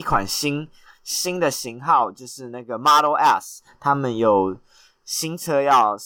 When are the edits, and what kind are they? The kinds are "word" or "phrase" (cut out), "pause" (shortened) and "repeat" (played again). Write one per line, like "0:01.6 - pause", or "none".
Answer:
none